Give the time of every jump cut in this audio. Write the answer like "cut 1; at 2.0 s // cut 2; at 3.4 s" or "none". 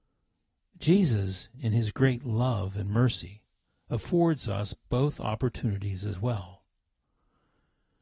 none